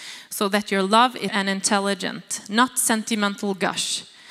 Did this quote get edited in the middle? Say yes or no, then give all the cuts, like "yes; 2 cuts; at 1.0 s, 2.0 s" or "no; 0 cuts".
yes; 1 cut; at 1.3 s